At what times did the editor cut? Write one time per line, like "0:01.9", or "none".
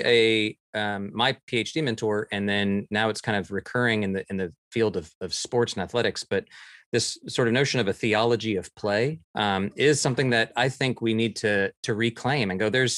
0:09.2